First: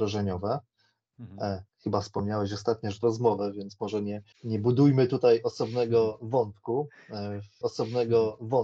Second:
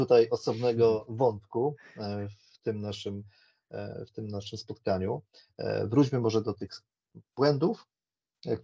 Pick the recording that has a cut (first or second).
first